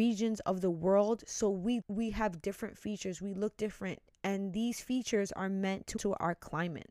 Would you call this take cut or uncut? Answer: cut